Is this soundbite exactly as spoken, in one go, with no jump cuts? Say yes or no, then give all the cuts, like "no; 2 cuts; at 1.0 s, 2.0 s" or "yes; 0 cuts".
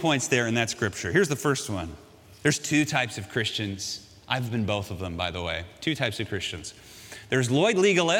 yes; 0 cuts